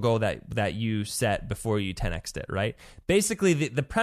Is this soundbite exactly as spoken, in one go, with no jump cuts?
yes; 0 cuts

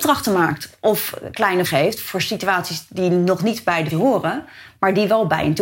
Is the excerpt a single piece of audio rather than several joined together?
no; 2 cuts; at 1.7 s, 3.9 s

